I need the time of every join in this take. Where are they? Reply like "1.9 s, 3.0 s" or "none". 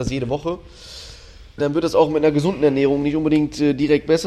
1.6 s